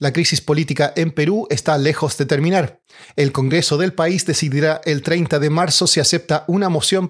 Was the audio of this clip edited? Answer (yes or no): no